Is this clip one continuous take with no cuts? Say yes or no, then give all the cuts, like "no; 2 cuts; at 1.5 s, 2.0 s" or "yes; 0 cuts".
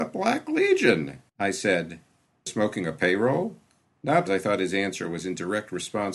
no; 3 cuts; at 1.3 s, 2.5 s, 4.3 s